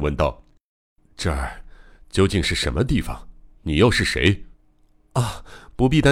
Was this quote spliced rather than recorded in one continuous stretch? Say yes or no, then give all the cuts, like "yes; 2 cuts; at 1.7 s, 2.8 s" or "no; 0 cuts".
yes; 1 cut; at 4.5 s